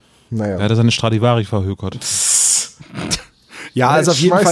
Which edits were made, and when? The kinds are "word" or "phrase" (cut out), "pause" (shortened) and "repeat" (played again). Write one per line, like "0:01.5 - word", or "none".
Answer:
none